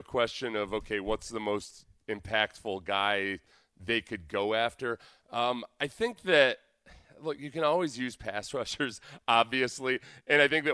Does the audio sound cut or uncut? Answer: uncut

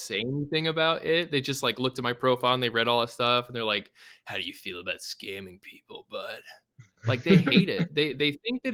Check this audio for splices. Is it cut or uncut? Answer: uncut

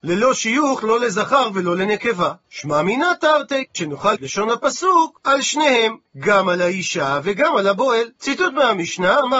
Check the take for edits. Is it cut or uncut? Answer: cut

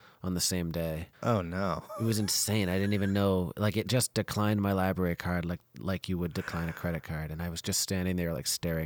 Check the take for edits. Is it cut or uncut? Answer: cut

